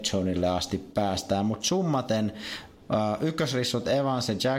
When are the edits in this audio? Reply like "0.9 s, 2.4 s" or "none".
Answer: none

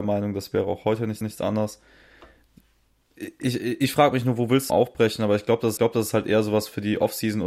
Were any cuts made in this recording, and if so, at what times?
1.2 s, 4.7 s, 5.8 s

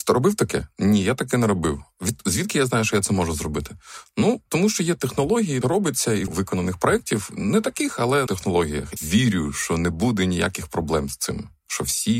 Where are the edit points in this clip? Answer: 5.6 s, 6.3 s, 8.3 s, 9.0 s

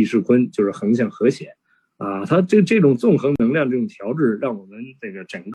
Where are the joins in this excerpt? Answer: none

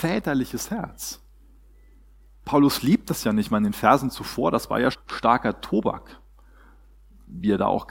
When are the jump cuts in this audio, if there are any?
4.9 s

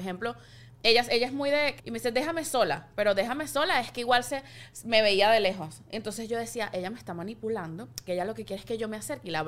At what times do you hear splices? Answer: 1.8 s, 8.1 s

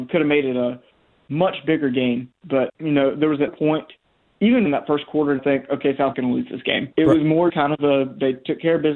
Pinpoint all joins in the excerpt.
2.7 s, 3.5 s, 4.7 s, 5.4 s, 6.1 s, 6.9 s, 7.5 s

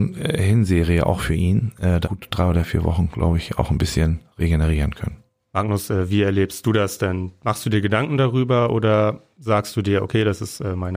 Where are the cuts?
2.0 s, 5.4 s

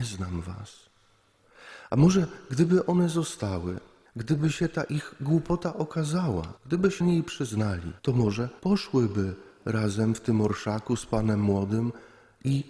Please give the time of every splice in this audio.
4.1 s, 6.6 s, 7.0 s, 8.0 s, 8.6 s

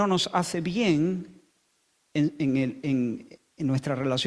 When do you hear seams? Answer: none

